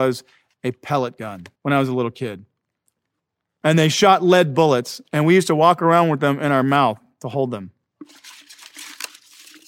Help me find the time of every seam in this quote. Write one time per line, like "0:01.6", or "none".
0:01.5